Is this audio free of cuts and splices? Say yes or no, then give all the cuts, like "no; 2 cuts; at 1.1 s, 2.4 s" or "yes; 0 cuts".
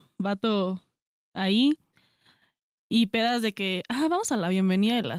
yes; 0 cuts